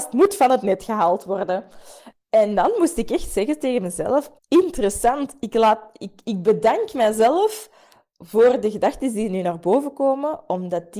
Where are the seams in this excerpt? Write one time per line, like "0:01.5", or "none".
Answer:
0:04.4